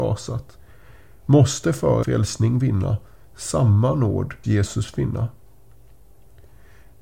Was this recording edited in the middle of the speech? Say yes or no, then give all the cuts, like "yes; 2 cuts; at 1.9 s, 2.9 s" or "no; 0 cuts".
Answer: yes; 2 cuts; at 2.0 s, 4.4 s